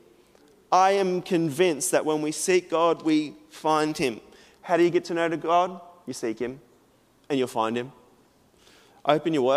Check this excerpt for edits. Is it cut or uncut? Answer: uncut